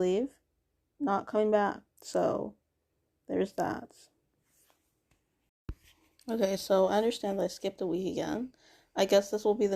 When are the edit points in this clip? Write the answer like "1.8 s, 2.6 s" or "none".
1.9 s